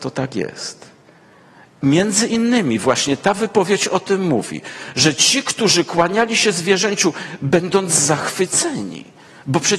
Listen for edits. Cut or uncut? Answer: uncut